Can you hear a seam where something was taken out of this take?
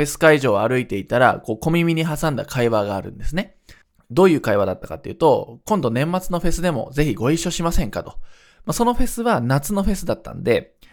no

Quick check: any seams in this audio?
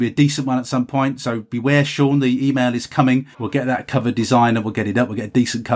yes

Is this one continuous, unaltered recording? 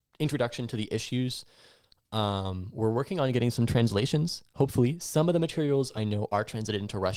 yes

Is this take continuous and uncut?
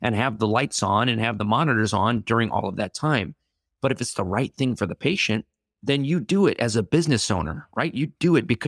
yes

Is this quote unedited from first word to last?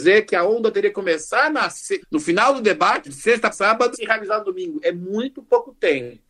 no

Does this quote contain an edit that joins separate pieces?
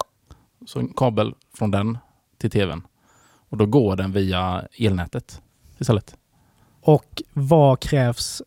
no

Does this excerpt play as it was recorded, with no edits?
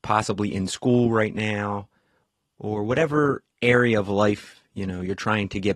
yes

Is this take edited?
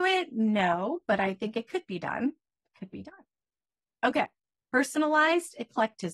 no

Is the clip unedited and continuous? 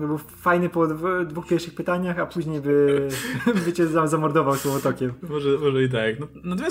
yes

